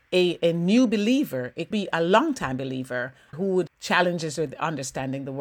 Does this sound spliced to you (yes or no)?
yes